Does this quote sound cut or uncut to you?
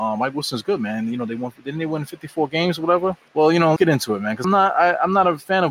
cut